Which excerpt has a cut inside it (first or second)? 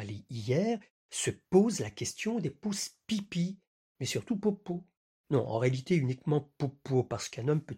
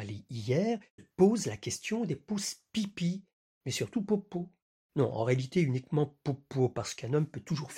second